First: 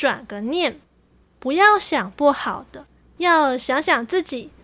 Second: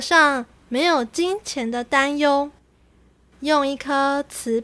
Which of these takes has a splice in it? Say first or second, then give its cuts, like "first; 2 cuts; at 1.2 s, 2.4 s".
first; 1 cut; at 3.0 s